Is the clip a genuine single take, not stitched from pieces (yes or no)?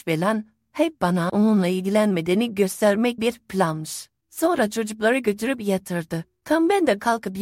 no